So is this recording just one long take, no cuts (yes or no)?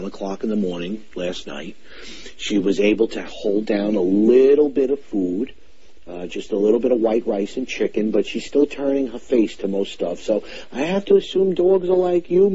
yes